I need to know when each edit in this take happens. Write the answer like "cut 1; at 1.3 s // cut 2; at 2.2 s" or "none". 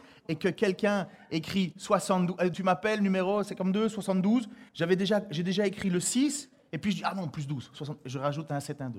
cut 1; at 2.5 s // cut 2; at 4.7 s